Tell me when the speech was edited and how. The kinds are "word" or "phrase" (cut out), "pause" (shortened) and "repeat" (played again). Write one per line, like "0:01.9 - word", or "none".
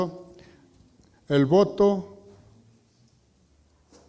none